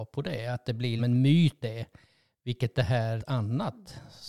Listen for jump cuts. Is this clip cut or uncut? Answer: cut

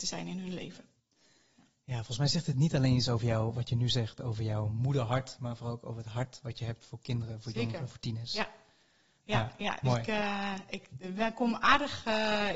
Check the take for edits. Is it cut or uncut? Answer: uncut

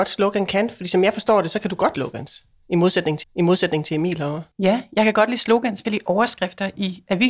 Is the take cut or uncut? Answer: cut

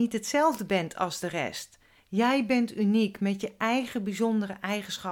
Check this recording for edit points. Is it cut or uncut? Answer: uncut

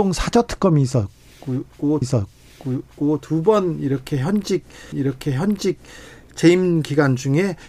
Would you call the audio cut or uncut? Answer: cut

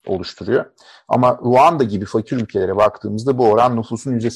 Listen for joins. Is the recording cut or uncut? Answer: uncut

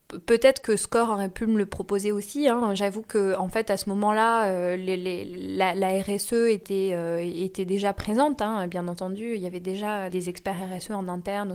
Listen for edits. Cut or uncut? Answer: cut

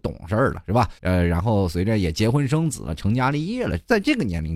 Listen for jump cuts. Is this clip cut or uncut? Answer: cut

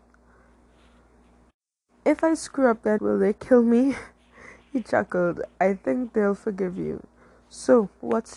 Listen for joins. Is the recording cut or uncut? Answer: cut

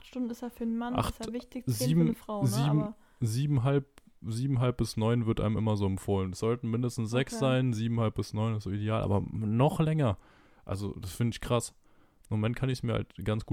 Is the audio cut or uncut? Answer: uncut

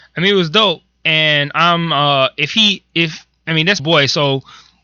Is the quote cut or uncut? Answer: cut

